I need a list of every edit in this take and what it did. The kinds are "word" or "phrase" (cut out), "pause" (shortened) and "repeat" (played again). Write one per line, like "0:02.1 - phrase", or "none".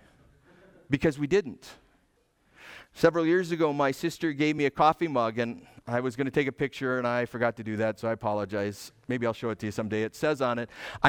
none